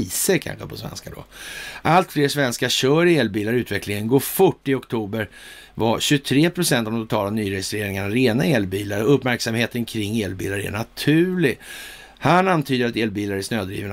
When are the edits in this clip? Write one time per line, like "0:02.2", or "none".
none